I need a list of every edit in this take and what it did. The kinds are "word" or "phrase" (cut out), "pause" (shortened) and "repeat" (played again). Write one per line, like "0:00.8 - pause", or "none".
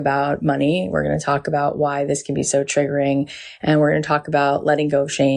none